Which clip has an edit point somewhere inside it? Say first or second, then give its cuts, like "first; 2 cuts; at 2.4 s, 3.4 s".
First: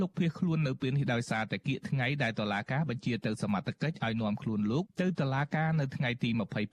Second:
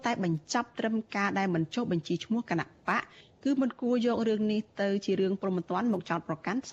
first; 1 cut; at 4.9 s